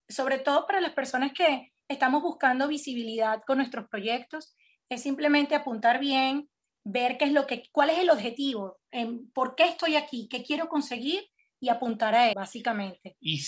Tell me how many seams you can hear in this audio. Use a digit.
1